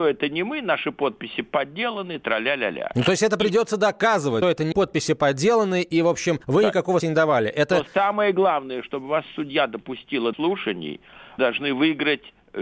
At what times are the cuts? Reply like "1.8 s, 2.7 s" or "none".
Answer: 4.4 s, 4.7 s, 6.4 s, 7.0 s, 10.3 s, 11.4 s